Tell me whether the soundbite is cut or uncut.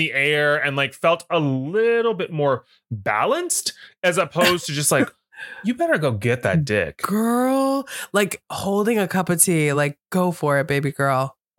uncut